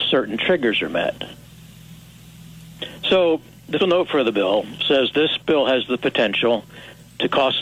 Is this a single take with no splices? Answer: no; 2 cuts; at 3.8 s, 5.1 s

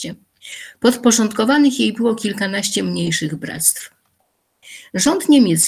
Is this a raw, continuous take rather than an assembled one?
yes; 0 cuts

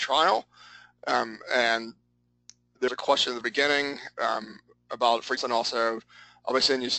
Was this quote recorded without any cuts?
no; 3 cuts; at 2.9 s, 3.4 s, 5.4 s

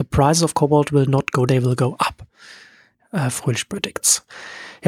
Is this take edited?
yes; 1 cut; at 1.5 s

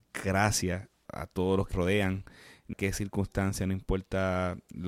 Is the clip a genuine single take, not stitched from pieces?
no; 3 cuts; at 1.1 s, 1.7 s, 2.7 s

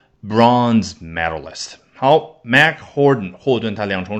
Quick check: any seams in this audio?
no; 0 cuts

